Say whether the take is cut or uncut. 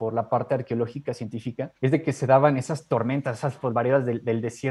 cut